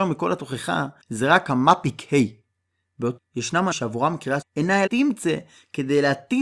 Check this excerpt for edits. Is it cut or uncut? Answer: cut